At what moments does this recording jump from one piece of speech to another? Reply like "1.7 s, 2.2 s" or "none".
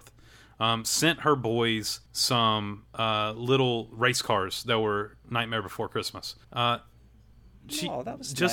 2.1 s, 6.4 s